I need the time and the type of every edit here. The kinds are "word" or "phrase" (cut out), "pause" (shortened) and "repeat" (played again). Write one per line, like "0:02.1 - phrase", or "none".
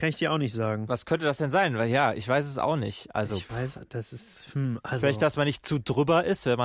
none